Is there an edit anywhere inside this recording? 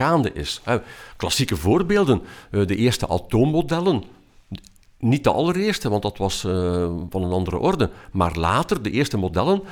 no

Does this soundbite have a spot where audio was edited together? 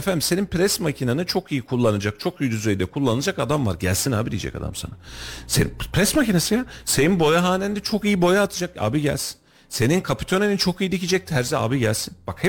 no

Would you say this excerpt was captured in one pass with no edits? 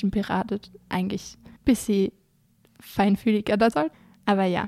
no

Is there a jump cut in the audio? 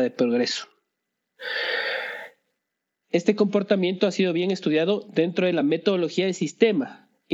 no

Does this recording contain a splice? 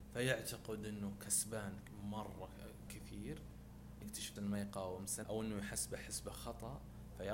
yes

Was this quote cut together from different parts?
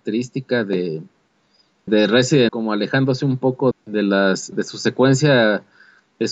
yes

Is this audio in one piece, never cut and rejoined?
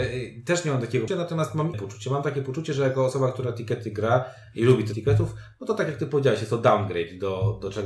no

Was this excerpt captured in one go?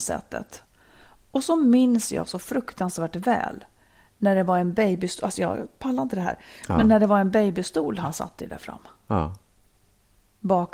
yes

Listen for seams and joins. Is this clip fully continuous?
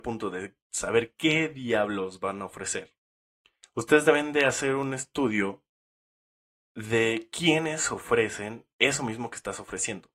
yes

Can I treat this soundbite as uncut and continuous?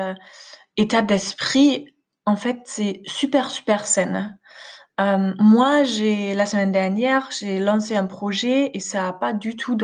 yes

